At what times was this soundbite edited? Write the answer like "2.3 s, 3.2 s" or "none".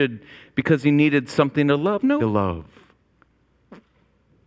2.2 s